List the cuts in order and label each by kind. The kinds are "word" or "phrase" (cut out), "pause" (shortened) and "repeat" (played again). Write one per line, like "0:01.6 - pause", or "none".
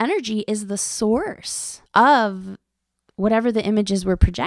0:01.9 - pause